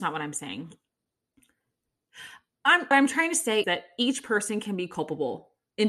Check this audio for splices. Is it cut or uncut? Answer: cut